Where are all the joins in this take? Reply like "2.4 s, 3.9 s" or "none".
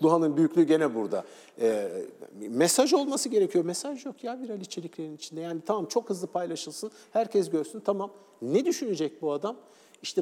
none